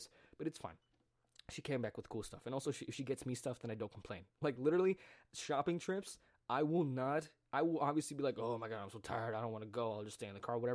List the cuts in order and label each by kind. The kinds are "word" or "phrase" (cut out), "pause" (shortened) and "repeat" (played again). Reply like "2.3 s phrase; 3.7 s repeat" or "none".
none